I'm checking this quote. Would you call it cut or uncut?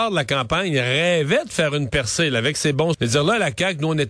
cut